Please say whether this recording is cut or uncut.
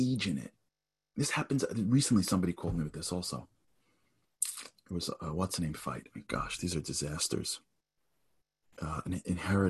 uncut